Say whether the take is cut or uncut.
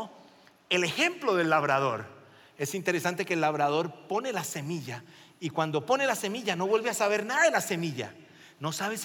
uncut